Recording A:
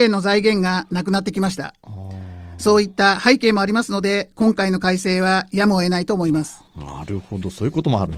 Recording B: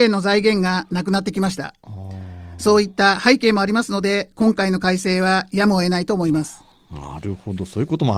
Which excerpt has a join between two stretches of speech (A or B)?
A